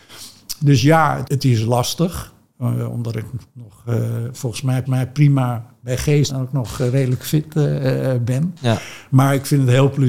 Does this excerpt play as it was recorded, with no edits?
no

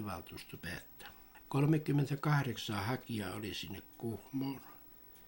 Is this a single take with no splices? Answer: yes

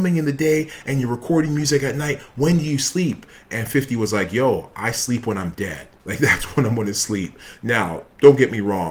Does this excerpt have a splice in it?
yes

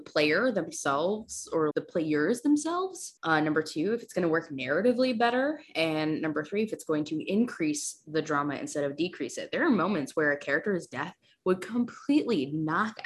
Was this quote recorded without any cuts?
no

